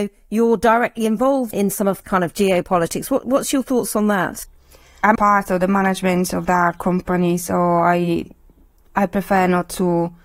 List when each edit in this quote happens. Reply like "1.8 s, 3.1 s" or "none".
1.5 s, 2.0 s, 5.2 s